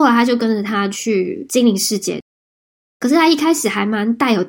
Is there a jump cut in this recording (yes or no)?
no